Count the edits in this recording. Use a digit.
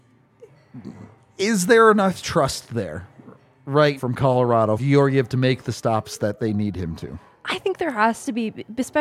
2